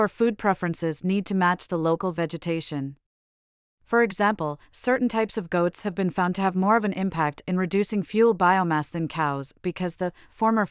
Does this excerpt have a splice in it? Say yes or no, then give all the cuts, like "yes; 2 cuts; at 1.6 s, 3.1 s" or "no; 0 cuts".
no; 0 cuts